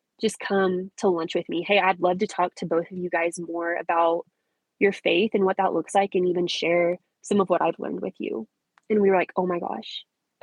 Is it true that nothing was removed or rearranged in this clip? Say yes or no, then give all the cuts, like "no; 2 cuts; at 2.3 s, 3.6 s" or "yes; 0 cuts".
yes; 0 cuts